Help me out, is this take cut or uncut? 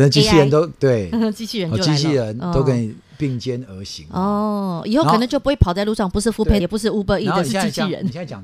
cut